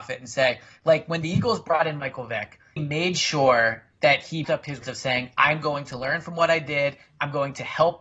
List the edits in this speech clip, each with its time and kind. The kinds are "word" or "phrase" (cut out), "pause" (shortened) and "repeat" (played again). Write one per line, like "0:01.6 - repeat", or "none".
0:02.8 - word
0:04.4 - word
0:04.8 - word